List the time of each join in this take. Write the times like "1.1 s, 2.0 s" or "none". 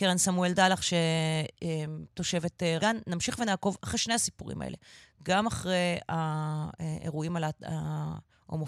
2.8 s